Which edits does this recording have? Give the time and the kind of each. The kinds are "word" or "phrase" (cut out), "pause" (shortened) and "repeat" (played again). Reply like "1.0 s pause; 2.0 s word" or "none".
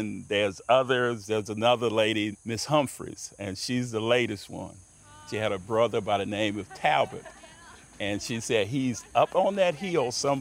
2.3 s word